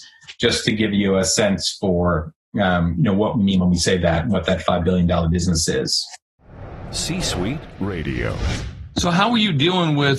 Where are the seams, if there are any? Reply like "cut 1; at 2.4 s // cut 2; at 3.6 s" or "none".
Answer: none